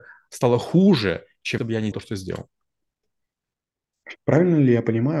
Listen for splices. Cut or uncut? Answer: cut